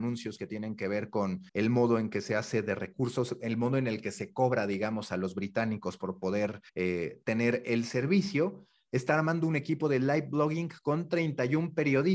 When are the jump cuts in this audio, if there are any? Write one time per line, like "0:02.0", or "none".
0:01.5
0:06.7